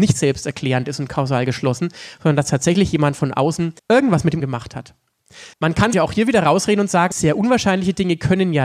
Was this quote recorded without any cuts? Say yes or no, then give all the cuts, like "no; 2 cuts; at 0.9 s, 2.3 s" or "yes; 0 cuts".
no; 5 cuts; at 3.8 s, 4.4 s, 5.5 s, 5.9 s, 7.1 s